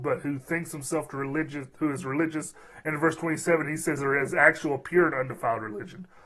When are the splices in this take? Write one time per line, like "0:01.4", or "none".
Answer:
none